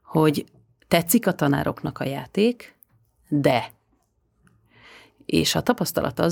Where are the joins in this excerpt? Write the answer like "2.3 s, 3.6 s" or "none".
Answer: none